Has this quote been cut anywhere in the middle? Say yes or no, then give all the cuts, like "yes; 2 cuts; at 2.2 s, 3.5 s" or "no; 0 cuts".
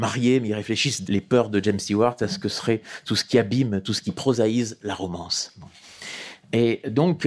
yes; 1 cut; at 1.0 s